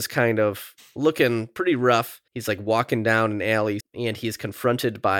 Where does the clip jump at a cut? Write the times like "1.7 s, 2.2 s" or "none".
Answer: 2.3 s, 3.8 s